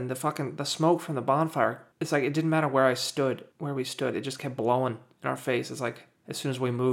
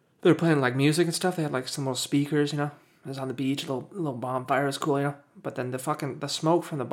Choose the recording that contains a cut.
first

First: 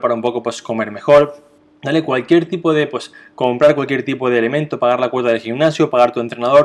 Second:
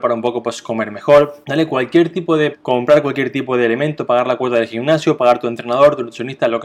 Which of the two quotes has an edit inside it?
second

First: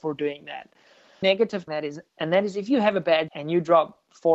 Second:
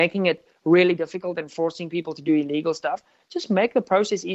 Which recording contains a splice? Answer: first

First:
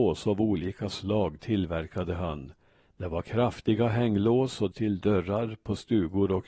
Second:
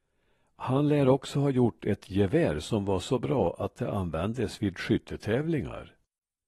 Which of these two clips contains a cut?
first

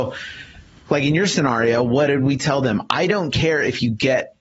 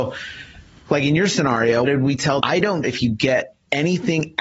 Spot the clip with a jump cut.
second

